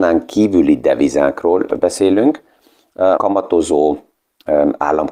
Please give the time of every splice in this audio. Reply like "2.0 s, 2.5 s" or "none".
3.2 s